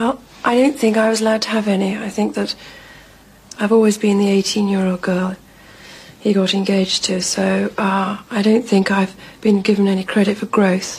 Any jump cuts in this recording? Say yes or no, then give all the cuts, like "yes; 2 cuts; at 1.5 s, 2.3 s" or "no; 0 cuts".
no; 0 cuts